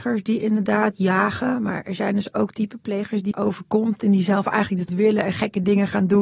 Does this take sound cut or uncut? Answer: cut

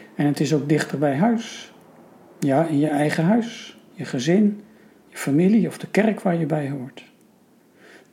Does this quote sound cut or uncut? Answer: uncut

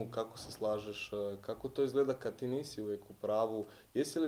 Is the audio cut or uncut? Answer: uncut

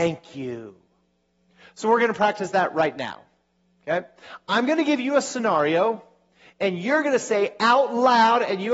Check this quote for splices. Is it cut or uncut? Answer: uncut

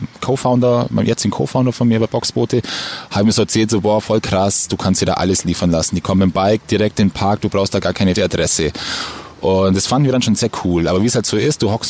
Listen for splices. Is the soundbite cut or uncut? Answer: cut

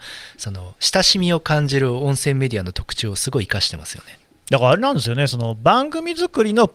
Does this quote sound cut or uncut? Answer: uncut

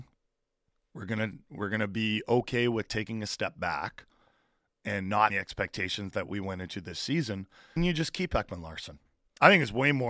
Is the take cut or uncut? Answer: cut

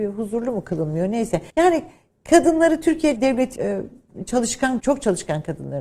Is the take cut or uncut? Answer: cut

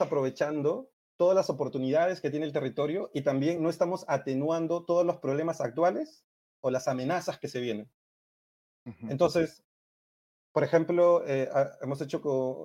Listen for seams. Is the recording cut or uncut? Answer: uncut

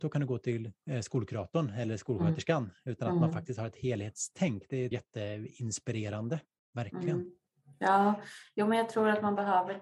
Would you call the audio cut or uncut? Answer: cut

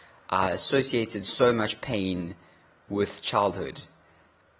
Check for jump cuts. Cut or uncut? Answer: uncut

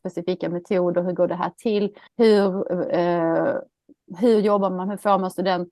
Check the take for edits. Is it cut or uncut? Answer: cut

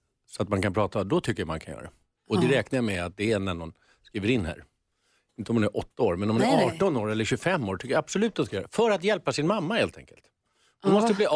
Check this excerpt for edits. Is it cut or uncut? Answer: uncut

